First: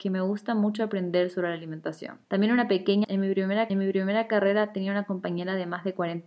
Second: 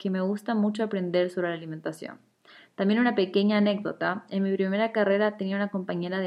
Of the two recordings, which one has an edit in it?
first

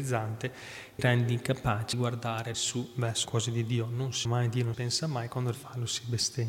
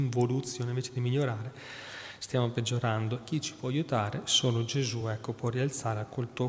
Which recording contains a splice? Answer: first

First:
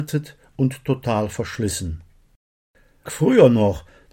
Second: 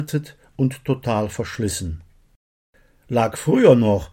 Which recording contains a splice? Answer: first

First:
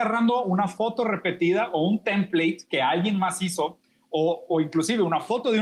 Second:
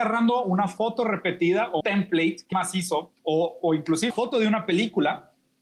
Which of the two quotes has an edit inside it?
second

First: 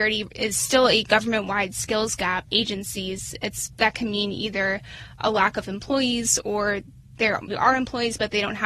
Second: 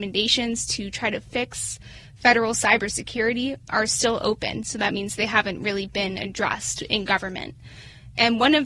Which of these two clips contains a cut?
first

